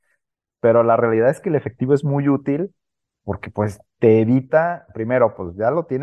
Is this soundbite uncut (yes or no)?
no